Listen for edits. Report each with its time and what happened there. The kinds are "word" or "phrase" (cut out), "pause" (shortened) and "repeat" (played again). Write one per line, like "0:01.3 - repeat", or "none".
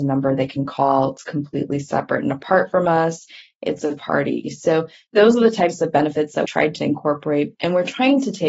0:04.0 - word
0:06.4 - word